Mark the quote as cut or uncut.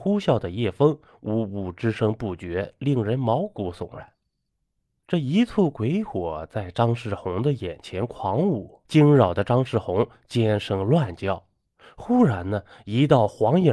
cut